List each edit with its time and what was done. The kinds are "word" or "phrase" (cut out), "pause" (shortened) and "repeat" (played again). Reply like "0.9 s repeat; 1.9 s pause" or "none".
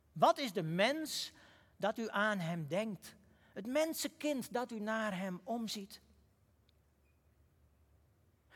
none